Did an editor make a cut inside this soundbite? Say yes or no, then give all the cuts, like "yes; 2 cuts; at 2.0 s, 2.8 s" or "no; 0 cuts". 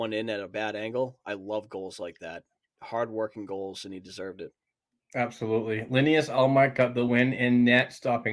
no; 0 cuts